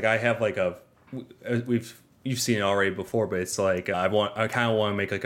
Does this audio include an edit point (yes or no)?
no